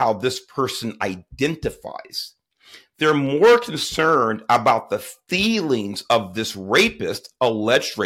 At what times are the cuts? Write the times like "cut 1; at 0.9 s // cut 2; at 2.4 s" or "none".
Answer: none